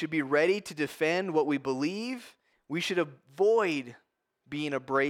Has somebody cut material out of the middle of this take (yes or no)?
yes